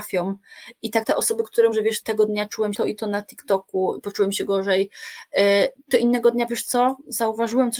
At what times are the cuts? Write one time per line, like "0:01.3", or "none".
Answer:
0:01.0
0:01.7
0:02.0
0:02.7
0:06.5